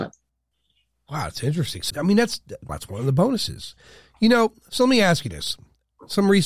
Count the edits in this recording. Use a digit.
2